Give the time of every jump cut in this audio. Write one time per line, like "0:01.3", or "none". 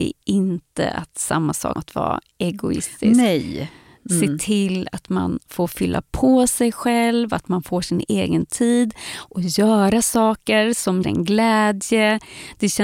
0:01.8
0:11.0